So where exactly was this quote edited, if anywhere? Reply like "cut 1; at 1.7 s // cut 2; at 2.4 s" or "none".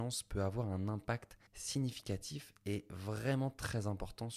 cut 1; at 1.5 s